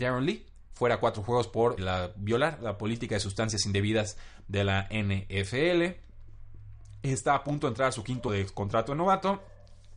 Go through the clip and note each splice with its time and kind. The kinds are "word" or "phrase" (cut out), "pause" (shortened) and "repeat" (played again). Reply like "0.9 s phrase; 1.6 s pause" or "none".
1.8 s word; 8.3 s word